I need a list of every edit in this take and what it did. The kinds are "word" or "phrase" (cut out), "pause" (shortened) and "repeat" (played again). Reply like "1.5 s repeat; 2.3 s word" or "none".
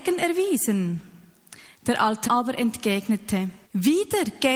2.2 s word; 3.6 s pause